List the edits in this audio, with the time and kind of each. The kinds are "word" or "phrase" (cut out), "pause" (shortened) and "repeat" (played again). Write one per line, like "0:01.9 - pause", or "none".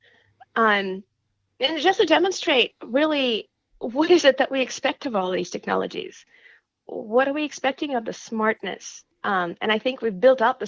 0:09.1 - pause